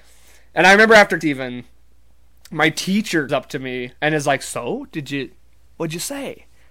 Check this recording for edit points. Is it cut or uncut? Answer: cut